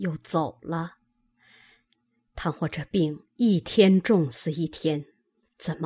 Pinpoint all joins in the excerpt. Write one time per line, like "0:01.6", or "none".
none